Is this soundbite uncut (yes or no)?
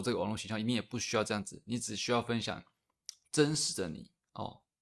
yes